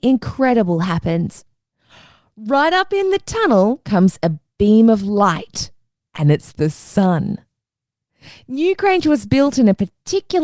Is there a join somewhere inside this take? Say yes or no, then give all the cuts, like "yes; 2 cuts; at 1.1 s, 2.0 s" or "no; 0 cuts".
no; 0 cuts